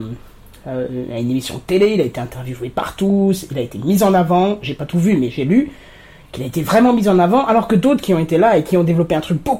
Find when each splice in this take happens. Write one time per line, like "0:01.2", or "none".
none